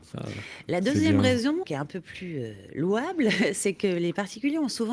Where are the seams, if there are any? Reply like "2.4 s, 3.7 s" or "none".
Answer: 1.6 s